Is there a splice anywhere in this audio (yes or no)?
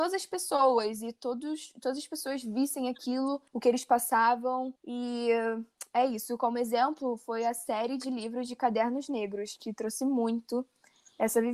yes